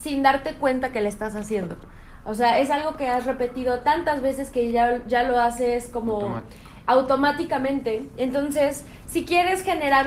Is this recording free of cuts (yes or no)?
yes